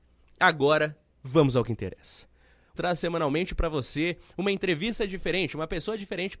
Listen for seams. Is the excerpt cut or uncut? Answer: cut